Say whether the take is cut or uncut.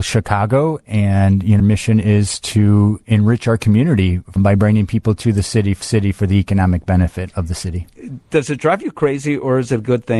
cut